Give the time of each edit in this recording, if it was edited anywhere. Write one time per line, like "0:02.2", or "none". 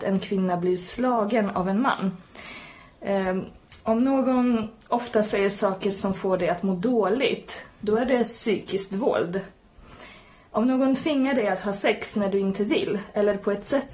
none